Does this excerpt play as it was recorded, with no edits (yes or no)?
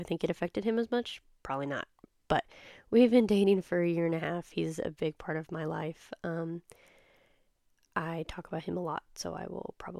yes